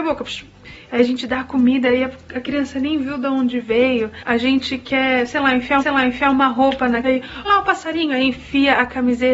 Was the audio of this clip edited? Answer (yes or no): yes